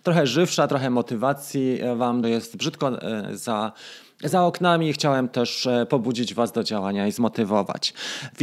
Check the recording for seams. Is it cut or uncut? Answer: cut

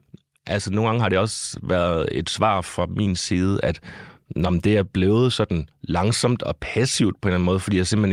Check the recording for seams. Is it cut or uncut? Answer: uncut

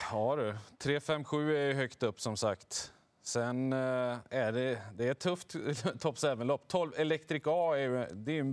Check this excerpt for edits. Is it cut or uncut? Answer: uncut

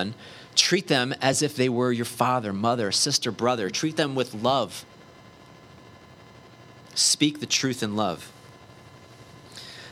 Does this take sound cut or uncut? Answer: uncut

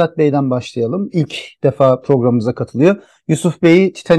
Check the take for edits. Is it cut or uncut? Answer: uncut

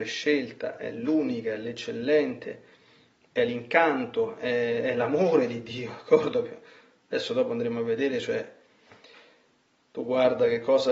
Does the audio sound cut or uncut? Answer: uncut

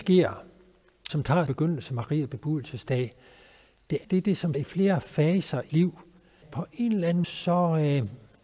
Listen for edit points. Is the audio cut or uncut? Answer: cut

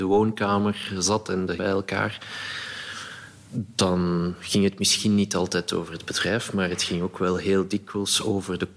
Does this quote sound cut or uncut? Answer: cut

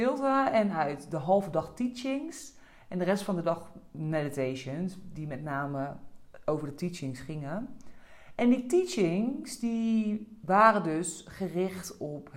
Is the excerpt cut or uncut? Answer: uncut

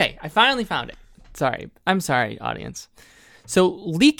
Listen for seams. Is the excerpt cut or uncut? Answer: uncut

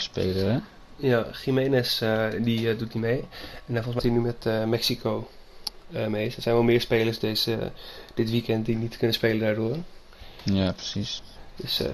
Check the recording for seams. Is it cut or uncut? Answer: cut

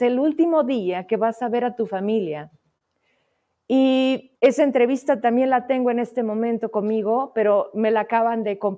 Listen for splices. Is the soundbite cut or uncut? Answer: cut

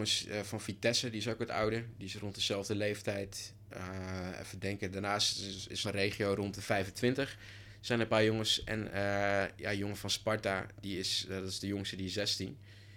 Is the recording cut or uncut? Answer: cut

